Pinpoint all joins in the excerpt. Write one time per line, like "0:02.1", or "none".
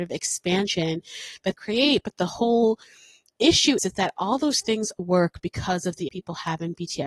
0:01.5
0:03.8
0:05.0
0:06.1